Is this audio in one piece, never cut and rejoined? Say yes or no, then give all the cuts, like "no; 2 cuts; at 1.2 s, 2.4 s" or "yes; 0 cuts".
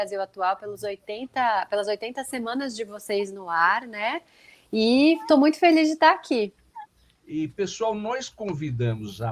yes; 0 cuts